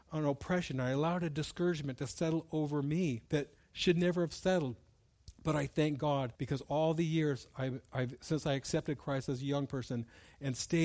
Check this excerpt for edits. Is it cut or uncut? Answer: cut